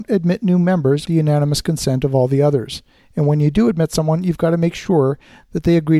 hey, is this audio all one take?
no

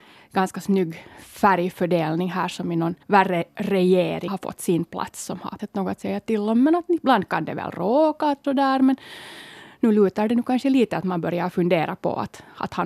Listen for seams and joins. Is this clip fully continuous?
no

